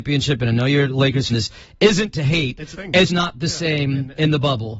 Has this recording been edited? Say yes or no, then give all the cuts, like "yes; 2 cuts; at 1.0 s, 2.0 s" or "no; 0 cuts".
yes; 3 cuts; at 1.3 s, 2.7 s, 3.1 s